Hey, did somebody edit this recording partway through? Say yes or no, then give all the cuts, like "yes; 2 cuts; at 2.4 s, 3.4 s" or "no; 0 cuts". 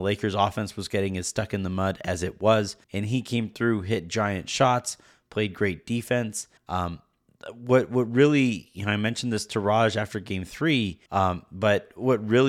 yes; 3 cuts; at 2.8 s, 6.6 s, 11.1 s